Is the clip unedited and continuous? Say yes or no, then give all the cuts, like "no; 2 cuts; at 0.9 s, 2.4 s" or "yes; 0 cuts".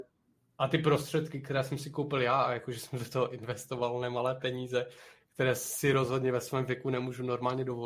yes; 0 cuts